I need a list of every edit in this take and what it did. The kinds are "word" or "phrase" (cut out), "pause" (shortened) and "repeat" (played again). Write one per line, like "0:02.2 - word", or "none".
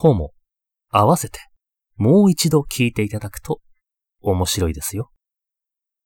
none